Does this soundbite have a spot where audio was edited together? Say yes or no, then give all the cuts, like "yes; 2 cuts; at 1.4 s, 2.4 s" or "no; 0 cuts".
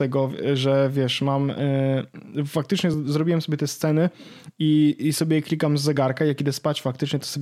no; 0 cuts